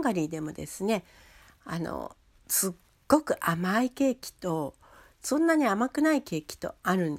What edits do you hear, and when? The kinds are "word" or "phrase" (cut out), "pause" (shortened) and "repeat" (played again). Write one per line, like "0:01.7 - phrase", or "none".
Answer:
none